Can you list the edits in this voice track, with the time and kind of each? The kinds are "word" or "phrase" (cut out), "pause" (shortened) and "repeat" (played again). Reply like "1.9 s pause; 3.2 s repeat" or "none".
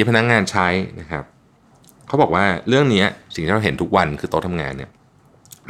none